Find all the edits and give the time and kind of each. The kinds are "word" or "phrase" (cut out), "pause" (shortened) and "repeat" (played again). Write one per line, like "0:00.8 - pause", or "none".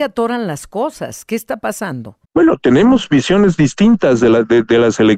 0:02.2 - pause